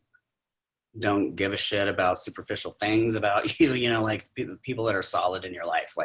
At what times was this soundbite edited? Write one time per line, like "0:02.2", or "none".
none